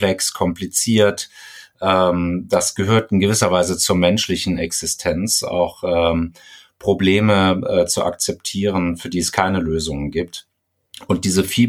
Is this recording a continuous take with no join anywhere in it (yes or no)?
yes